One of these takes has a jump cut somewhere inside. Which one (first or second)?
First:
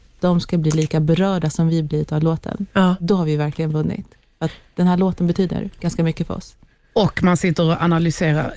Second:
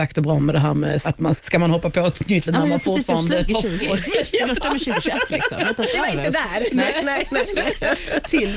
second